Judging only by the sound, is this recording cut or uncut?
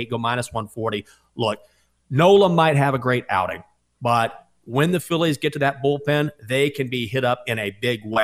uncut